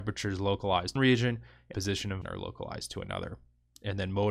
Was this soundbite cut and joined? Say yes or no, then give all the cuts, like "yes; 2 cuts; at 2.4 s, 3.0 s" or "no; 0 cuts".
yes; 3 cuts; at 1.0 s, 1.7 s, 2.2 s